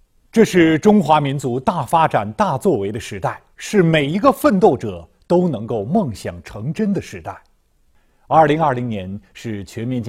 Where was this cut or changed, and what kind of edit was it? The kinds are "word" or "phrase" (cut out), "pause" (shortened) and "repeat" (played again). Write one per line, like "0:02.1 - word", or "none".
0:03.5 - pause